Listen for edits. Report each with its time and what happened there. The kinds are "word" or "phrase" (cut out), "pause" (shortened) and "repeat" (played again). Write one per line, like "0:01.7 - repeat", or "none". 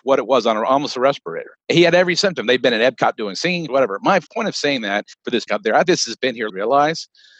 0:03.7 - word
0:04.3 - word
0:05.1 - pause
0:05.5 - word
0:05.9 - word
0:06.5 - phrase